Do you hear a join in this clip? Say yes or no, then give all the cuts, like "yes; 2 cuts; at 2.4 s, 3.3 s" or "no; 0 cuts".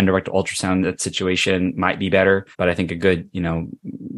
yes; 1 cut; at 2.5 s